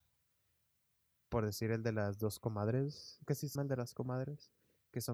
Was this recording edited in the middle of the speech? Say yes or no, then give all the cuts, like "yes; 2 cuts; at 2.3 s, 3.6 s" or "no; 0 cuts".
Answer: yes; 2 cuts; at 3.3 s, 3.6 s